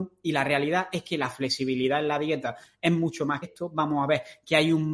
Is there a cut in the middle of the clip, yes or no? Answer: yes